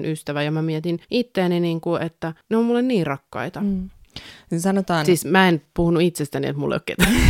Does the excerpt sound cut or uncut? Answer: cut